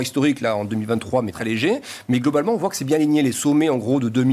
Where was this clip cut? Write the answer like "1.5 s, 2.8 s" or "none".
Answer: 1.3 s